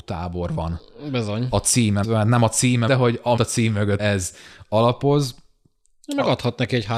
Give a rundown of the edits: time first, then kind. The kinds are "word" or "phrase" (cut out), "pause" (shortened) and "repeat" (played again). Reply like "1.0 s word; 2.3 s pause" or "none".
2.0 s word; 2.9 s word; 3.4 s word; 4.0 s word